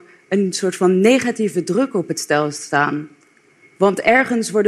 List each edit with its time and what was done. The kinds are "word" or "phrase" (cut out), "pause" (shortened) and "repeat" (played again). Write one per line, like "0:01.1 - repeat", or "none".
none